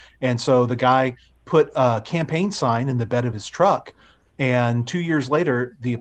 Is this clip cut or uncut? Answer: uncut